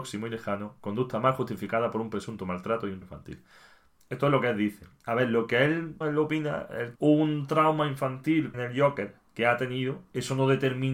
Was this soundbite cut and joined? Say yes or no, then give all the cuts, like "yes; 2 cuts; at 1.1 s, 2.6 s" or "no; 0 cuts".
yes; 4 cuts; at 3.0 s, 6.0 s, 6.9 s, 8.5 s